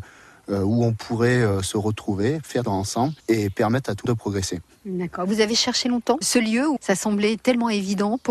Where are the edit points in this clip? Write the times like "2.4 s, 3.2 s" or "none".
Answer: 2.6 s, 3.2 s, 4.1 s, 6.2 s, 6.8 s